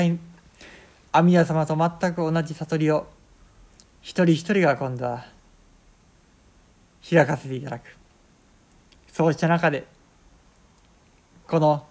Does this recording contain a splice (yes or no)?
yes